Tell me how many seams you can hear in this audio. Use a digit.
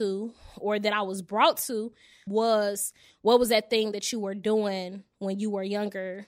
0